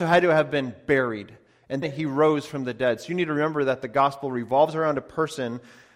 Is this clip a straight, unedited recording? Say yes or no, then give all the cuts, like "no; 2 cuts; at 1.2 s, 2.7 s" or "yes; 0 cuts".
no; 1 cut; at 1.8 s